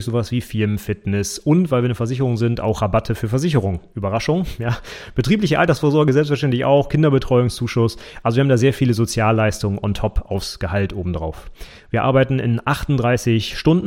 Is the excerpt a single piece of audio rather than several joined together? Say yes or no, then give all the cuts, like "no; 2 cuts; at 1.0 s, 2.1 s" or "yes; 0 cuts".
yes; 0 cuts